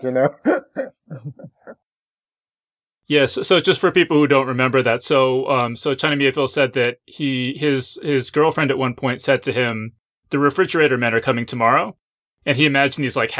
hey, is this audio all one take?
yes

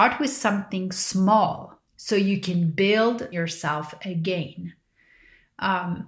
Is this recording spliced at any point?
yes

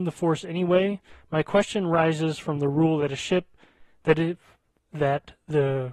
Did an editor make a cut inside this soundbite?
no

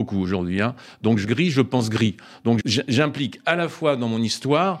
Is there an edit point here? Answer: yes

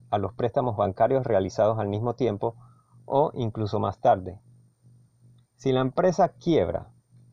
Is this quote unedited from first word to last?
yes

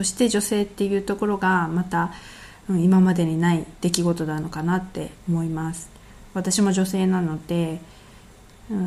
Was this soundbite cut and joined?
yes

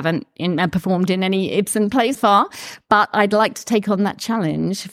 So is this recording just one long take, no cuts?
no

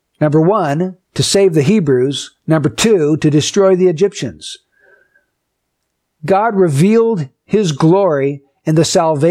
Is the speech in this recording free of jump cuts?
yes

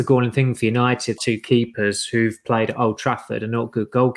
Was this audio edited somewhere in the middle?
yes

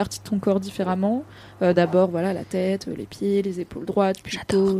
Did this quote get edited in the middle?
no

